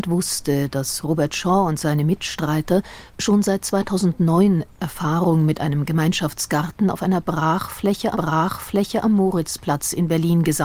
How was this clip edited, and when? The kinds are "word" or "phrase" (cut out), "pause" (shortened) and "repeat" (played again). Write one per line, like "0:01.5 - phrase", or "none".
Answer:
0:08.1 - repeat